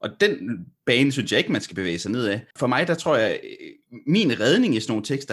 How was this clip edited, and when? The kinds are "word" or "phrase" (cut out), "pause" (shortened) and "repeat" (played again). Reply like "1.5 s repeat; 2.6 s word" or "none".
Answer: 2.5 s pause

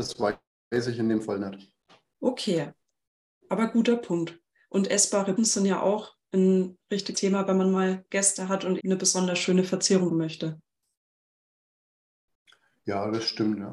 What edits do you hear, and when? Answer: 5.4 s word; 7.1 s word; 8.8 s word; 10.1 s word

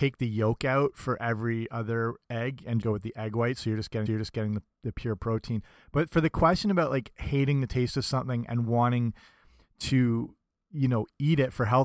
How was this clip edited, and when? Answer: 2.8 s word; 4.1 s repeat

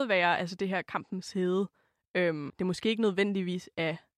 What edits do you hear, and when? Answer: 2.5 s word

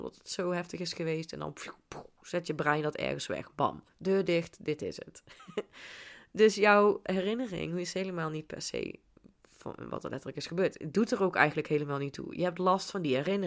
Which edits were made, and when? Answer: 3.9 s pause

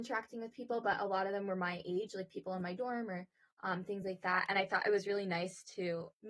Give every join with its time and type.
none

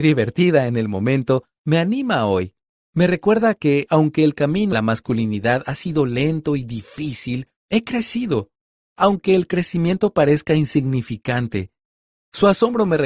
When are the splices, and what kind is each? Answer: 4.7 s word; 7.6 s pause

